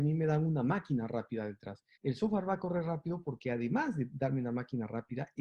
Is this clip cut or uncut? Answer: cut